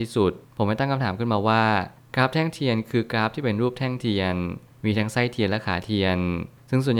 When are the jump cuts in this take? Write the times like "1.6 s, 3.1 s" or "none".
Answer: none

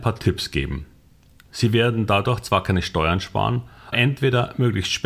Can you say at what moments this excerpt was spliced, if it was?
3.9 s

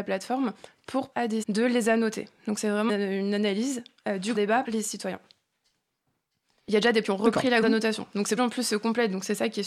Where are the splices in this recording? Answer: 1.1 s, 1.4 s, 2.9 s, 4.3 s, 4.6 s, 7.0 s, 7.6 s, 8.4 s

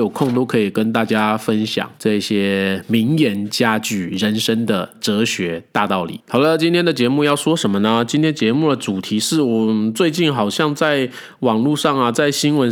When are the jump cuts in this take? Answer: 2.0 s

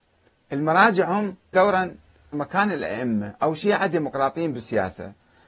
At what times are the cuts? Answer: 1.5 s, 2.3 s

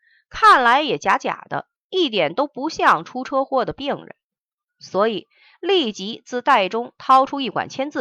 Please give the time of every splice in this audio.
none

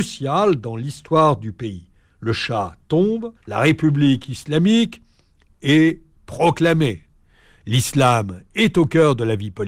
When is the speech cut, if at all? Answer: 3.4 s

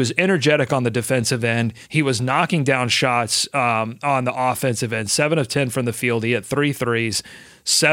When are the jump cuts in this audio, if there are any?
1.8 s

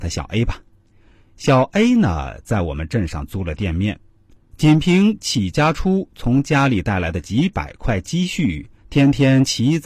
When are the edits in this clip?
8.8 s

